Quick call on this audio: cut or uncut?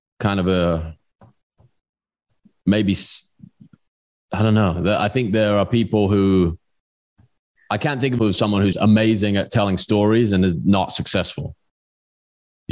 cut